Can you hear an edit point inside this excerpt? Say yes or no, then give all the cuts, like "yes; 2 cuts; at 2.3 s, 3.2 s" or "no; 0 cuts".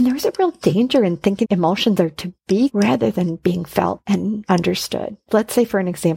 yes; 2 cuts; at 1.4 s, 2.7 s